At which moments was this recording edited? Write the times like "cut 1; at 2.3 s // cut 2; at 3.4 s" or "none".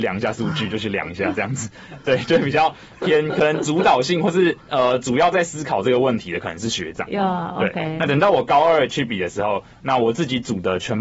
cut 1; at 4.6 s